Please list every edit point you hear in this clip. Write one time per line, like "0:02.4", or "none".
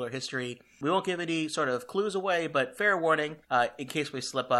0:03.4